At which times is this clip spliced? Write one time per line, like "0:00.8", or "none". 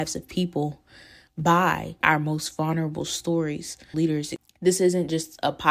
0:02.0
0:03.9